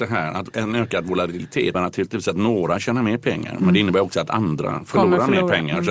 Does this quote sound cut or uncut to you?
cut